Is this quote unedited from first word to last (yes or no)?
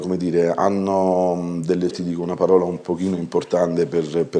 no